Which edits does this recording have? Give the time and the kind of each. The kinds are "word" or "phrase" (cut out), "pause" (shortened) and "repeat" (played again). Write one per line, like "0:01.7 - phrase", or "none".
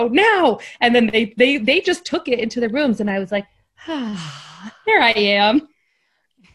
none